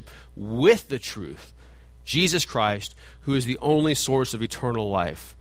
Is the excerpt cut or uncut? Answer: uncut